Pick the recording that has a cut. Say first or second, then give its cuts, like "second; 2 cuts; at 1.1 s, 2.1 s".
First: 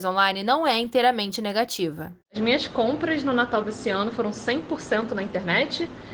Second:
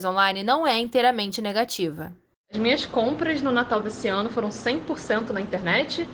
first; 1 cut; at 2.2 s